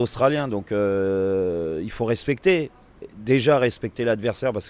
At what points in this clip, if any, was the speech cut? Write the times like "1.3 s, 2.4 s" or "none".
none